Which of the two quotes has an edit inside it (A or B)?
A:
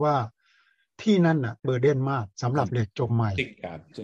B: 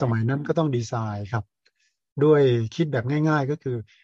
A